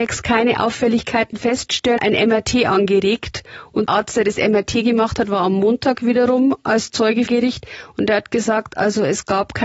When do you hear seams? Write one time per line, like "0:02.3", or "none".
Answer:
0:02.0
0:03.9
0:07.3